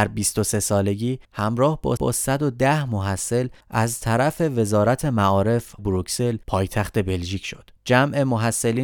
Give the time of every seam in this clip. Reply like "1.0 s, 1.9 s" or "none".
1.2 s, 2.0 s, 3.6 s, 5.8 s, 6.4 s, 7.8 s

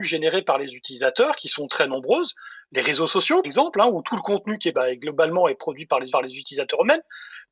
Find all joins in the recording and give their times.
3.4 s, 4.7 s, 6.1 s

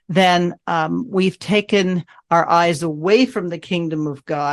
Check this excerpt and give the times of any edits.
none

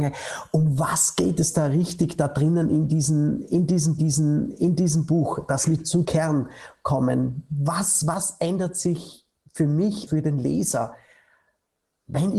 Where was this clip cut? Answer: 4.0 s, 6.0 s, 10.1 s

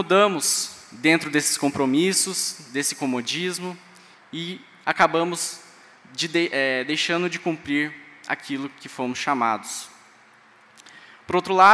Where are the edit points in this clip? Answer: none

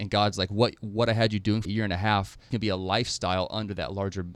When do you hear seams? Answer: 1.6 s, 2.5 s

